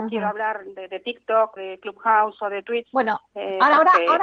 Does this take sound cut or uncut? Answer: cut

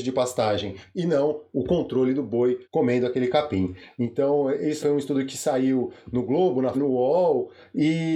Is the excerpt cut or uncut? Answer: cut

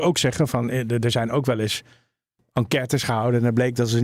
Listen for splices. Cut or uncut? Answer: uncut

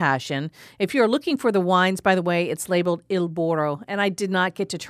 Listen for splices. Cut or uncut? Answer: uncut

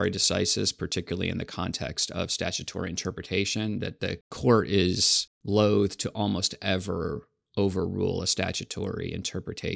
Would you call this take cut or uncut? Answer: uncut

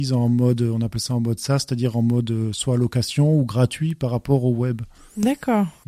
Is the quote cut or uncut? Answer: uncut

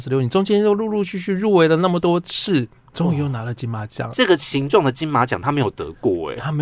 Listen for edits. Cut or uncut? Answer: cut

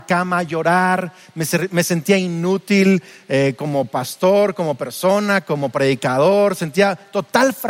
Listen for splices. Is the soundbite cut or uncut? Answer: uncut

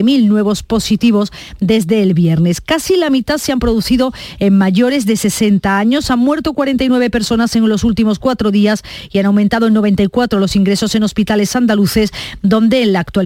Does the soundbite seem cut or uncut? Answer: uncut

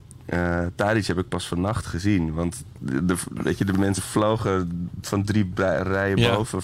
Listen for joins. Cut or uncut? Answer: uncut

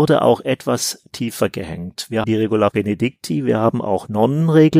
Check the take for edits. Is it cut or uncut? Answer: cut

